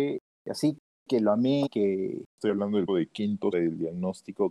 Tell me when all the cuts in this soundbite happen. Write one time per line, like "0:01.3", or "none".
0:01.7
0:02.3
0:02.9
0:03.5